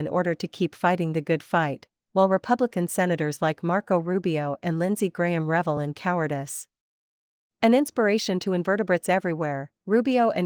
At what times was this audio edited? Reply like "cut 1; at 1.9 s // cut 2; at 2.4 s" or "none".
none